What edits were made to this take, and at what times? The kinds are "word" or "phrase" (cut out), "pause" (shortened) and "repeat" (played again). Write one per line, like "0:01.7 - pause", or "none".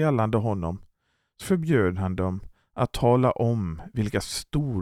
0:01.4 - word